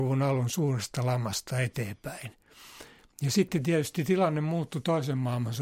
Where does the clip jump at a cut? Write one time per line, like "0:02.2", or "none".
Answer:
none